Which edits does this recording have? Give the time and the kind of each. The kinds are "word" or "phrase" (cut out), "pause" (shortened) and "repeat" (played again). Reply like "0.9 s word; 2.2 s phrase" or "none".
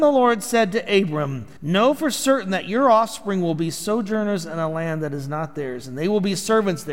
1.6 s pause